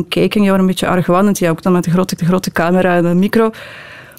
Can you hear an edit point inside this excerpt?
yes; 2 cuts; at 1.6 s, 2.2 s

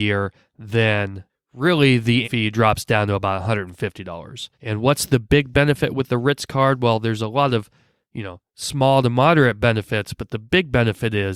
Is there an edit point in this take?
yes; 2 cuts; at 2.2 s, 4.5 s

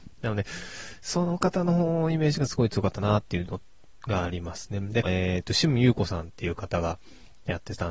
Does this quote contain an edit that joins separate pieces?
yes; 1 cut; at 5.0 s

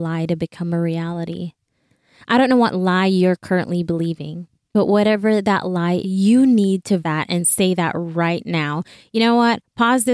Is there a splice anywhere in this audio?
yes; 2 cuts; at 6.0 s, 7.0 s

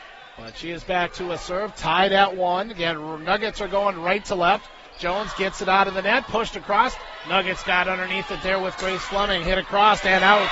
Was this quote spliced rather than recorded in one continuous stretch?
no; 0 cuts

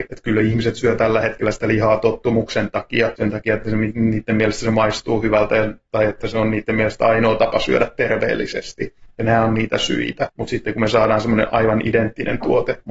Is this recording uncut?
yes; 0 cuts

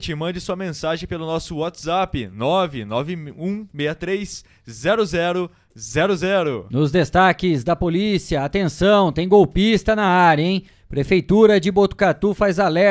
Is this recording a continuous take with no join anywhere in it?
yes; 0 cuts

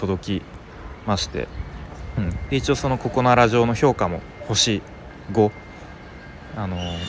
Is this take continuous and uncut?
yes; 0 cuts

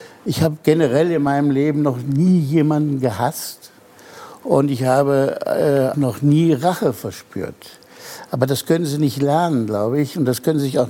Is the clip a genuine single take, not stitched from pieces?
no; 1 cut; at 5.9 s

